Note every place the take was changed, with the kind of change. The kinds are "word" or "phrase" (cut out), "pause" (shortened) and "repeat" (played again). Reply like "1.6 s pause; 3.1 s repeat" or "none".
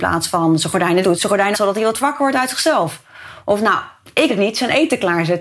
1.0 s word; 1.5 s phrase; 2.0 s word; 4.3 s word